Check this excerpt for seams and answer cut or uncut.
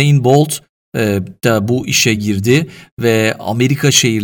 uncut